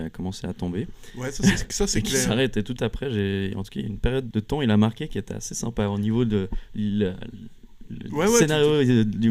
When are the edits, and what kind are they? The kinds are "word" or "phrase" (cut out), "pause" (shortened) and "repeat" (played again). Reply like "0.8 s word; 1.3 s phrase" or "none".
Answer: 2.8 s word; 4.3 s word